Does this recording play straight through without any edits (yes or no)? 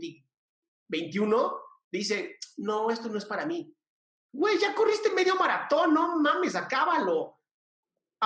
yes